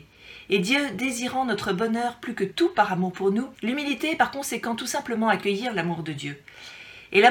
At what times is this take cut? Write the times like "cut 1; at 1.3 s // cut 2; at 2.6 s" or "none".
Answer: cut 1; at 3.5 s

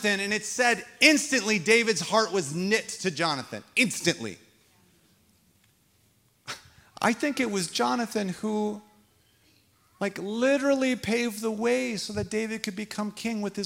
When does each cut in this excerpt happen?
none

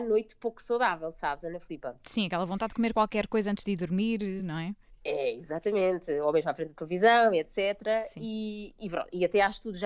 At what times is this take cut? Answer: none

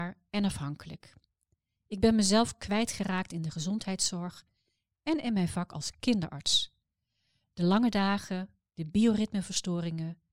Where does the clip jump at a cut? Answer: none

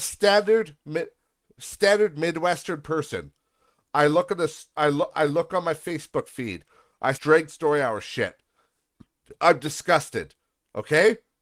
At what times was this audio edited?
cut 1; at 4.7 s // cut 2; at 7.1 s // cut 3; at 7.5 s

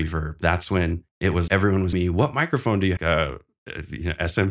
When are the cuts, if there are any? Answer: cut 1; at 1.1 s // cut 2; at 1.5 s // cut 3; at 1.9 s // cut 4; at 3.0 s

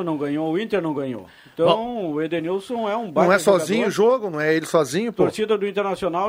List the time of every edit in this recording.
none

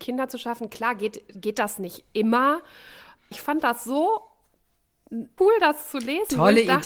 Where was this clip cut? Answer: cut 1; at 3.3 s // cut 2; at 5.4 s

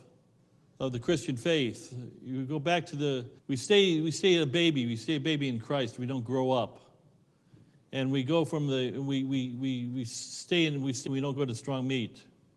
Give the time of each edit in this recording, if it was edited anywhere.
cut 1; at 3.4 s // cut 2; at 11.1 s

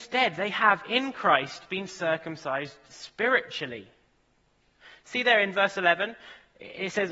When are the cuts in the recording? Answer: none

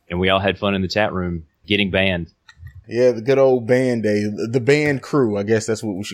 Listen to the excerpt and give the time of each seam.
cut 1; at 1.6 s // cut 2; at 2.8 s

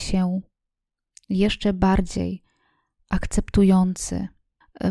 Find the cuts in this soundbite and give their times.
none

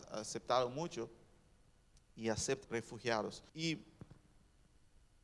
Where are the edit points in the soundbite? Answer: cut 1; at 2.6 s // cut 2; at 3.5 s

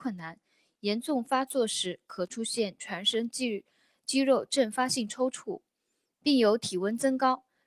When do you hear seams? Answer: none

